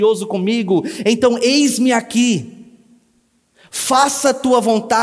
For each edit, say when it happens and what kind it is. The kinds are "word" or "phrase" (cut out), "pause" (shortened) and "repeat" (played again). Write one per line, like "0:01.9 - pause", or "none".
none